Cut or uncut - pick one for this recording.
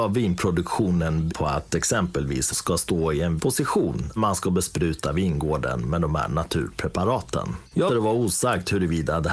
cut